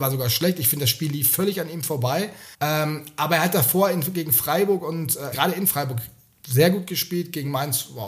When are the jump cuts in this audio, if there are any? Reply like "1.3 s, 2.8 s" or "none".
2.5 s, 5.3 s

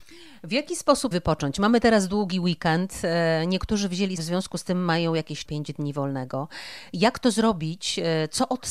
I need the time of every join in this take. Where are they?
1.1 s, 4.2 s, 5.4 s

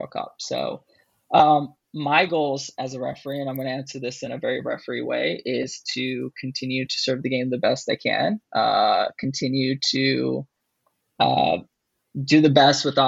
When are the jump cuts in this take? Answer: none

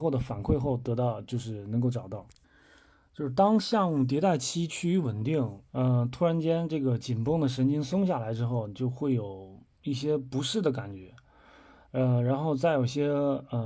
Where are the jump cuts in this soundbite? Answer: 2.4 s, 5.7 s

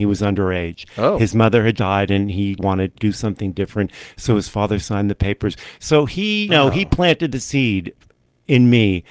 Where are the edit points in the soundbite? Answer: 1.8 s, 2.6 s, 2.9 s, 6.5 s

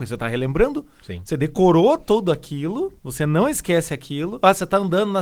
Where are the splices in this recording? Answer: 3.0 s

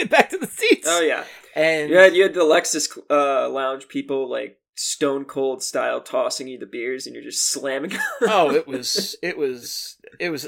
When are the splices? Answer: none

